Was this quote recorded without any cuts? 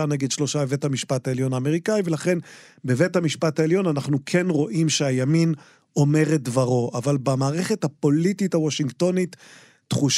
yes; 0 cuts

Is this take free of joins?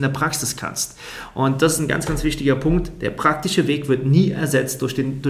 yes; 0 cuts

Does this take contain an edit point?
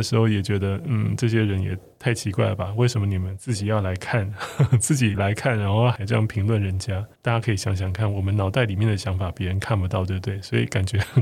yes; 1 cut; at 7.1 s

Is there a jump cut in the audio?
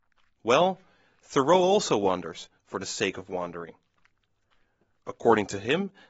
no; 0 cuts

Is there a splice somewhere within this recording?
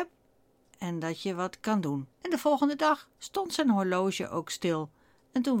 yes; 2 cuts; at 2.1 s, 3.1 s

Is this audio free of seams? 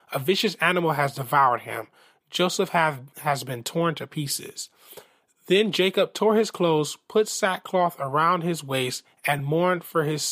yes; 0 cuts

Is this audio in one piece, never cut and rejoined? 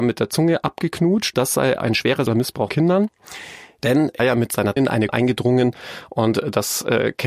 no; 7 cuts; at 1.3 s, 1.8 s, 2.3 s, 2.7 s, 4.2 s, 4.8 s, 5.1 s

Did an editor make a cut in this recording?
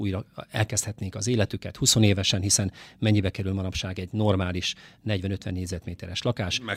no; 0 cuts

